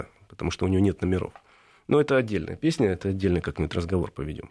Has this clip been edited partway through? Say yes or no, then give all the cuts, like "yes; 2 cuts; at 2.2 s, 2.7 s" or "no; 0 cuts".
no; 0 cuts